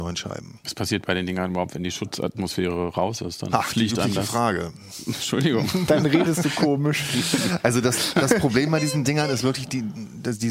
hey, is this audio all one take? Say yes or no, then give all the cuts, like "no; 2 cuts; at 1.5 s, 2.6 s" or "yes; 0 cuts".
yes; 0 cuts